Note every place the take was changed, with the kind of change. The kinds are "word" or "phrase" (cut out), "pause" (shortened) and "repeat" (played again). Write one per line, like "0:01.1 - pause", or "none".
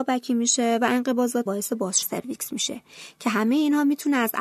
0:01.5 - word
0:02.0 - word